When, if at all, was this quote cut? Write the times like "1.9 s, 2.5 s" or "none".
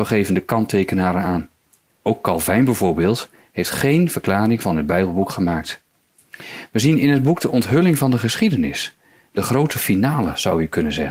none